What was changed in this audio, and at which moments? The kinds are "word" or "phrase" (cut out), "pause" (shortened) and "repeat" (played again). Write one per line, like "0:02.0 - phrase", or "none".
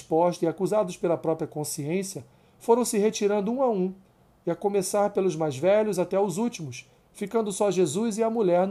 none